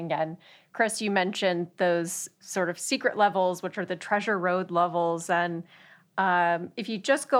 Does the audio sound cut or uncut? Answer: uncut